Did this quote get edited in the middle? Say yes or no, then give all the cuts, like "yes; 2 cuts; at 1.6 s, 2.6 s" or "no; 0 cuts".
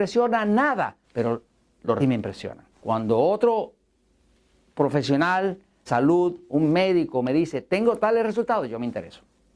yes; 4 cuts; at 1.0 s, 2.0 s, 2.7 s, 5.9 s